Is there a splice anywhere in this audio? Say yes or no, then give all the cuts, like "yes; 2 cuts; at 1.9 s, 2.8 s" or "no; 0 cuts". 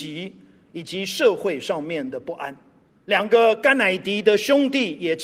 yes; 1 cut; at 2.9 s